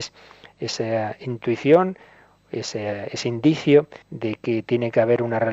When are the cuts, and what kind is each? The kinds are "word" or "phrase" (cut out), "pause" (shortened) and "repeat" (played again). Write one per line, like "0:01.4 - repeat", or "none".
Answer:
0:04.0 - pause